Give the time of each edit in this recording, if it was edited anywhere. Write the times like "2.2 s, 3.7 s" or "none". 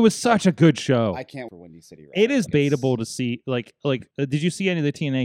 1.5 s, 2.5 s, 4.1 s